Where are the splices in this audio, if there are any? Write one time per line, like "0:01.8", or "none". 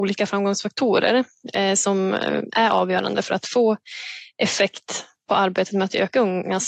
none